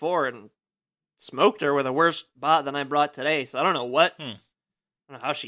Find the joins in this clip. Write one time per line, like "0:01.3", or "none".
none